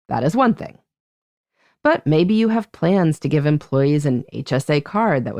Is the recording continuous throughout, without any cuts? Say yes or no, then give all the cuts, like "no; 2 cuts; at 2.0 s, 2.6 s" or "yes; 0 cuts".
yes; 0 cuts